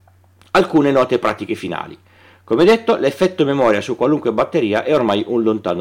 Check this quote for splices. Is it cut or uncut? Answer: uncut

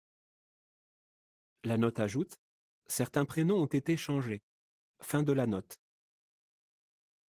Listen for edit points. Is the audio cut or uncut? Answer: uncut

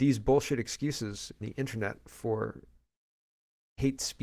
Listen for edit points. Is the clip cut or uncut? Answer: cut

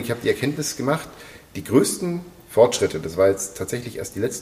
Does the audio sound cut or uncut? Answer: uncut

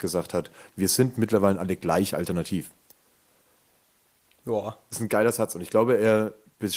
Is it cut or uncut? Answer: uncut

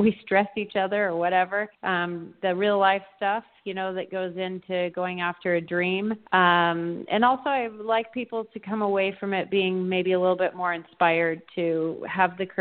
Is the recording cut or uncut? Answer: cut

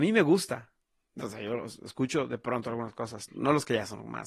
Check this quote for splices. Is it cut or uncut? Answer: cut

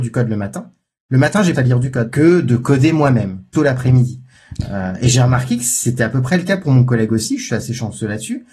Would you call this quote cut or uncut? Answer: cut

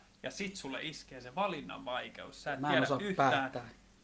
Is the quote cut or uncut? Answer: uncut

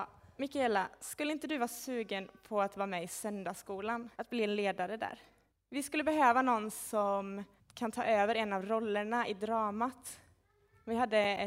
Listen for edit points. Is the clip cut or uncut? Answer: cut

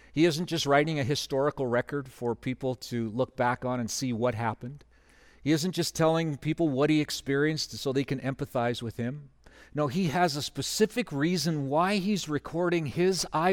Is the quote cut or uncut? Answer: uncut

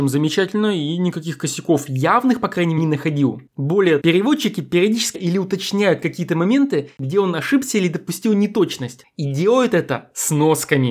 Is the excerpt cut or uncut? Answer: cut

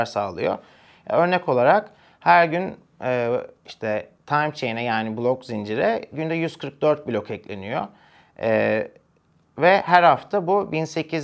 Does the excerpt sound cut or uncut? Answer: uncut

